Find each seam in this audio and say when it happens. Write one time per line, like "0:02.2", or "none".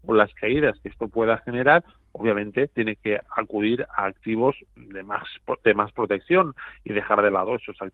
none